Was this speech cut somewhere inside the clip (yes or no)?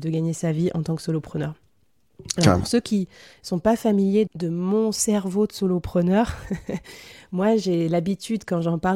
yes